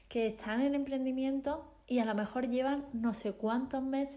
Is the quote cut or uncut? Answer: uncut